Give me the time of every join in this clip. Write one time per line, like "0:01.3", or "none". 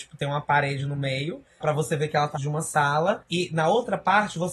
0:01.6
0:02.3